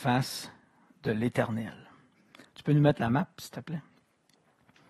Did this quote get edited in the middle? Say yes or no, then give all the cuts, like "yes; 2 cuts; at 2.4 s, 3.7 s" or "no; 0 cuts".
no; 0 cuts